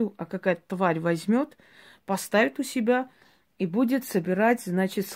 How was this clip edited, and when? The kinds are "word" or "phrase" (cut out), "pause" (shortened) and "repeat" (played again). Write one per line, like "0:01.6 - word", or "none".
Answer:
none